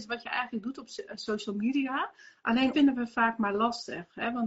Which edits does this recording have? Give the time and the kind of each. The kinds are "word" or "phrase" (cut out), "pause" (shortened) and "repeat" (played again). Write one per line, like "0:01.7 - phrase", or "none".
0:02.7 - phrase